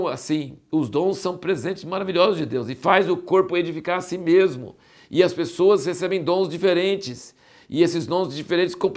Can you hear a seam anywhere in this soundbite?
no; 0 cuts

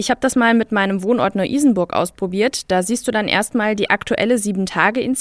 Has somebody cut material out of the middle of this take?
no; 0 cuts

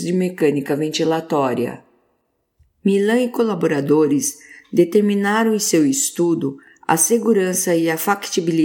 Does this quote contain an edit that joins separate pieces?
no; 0 cuts

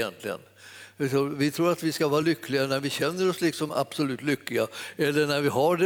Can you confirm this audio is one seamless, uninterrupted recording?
yes; 0 cuts

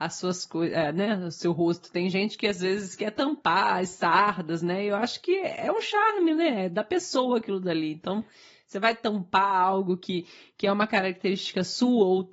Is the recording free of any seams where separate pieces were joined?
yes; 0 cuts

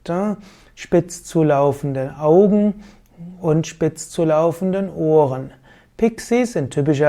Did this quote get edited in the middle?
no; 0 cuts

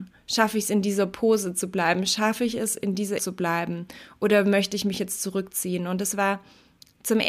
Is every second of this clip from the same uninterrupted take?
no; 1 cut; at 3.2 s

